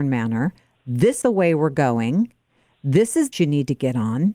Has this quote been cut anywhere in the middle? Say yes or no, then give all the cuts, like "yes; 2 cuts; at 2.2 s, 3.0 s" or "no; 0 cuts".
yes; 2 cuts; at 1.2 s, 3.3 s